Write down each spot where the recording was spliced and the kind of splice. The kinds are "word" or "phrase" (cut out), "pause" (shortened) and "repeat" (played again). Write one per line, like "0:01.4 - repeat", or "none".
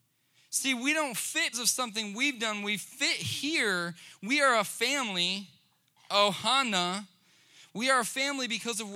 0:01.5 - word